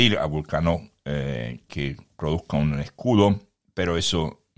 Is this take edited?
no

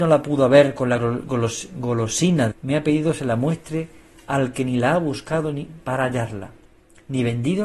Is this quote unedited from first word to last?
no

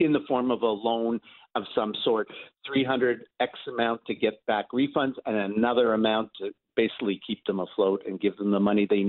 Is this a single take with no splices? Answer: yes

